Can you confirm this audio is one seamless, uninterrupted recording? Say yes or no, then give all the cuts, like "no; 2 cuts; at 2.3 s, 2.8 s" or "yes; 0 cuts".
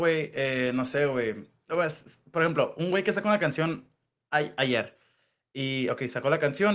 yes; 0 cuts